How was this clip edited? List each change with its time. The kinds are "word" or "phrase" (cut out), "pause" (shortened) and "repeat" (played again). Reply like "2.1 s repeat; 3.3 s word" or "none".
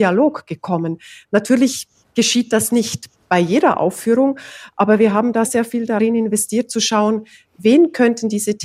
5.4 s word